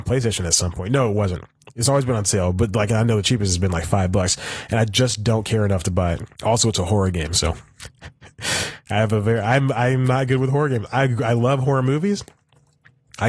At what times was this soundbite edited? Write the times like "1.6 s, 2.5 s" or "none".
6.3 s